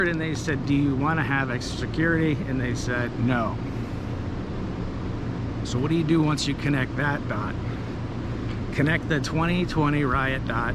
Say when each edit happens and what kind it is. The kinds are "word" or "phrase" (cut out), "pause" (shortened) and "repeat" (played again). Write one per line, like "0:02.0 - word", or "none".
none